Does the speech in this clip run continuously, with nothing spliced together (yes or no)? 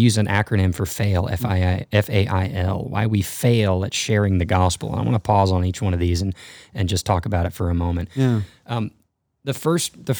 yes